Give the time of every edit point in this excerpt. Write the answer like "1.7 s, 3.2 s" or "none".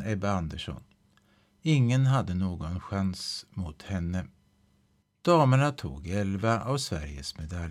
5.0 s